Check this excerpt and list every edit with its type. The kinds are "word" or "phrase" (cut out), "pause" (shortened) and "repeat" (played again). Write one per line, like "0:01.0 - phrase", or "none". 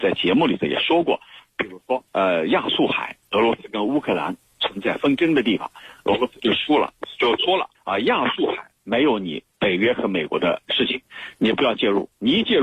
0:02.1 - pause
0:07.7 - pause
0:08.8 - pause
0:09.5 - pause